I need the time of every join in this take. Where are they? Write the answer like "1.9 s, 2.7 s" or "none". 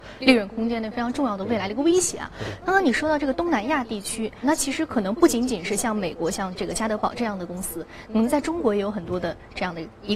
4.4 s

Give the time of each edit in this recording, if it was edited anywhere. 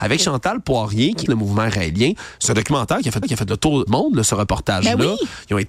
1.3 s, 3.2 s, 3.9 s

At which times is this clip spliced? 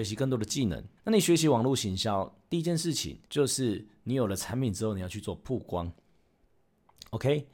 1.0 s, 3.3 s

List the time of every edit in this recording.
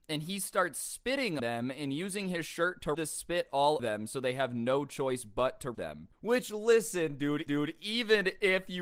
1.4 s, 2.9 s, 3.8 s, 5.7 s, 7.5 s

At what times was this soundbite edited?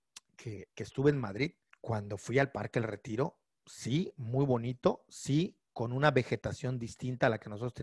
1.7 s

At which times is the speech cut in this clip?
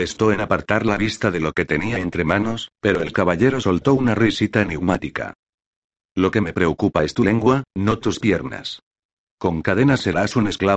none

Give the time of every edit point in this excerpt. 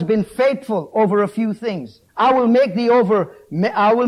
2.1 s

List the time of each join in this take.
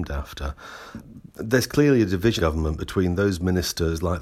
2.4 s

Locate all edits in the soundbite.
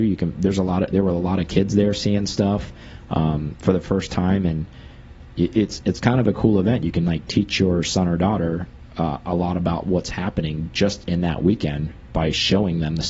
none

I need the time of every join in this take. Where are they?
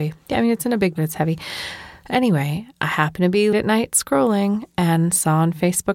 1.0 s, 3.5 s

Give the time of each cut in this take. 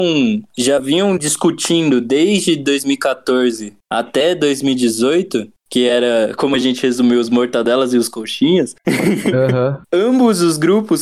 none

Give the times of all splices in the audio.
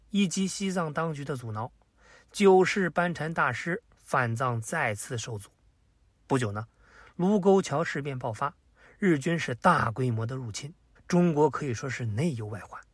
11.0 s

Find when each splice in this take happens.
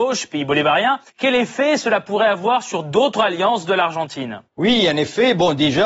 1.1 s, 4.5 s

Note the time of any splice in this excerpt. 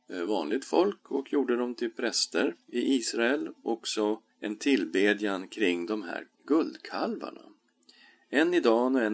2.6 s, 4.3 s, 6.3 s

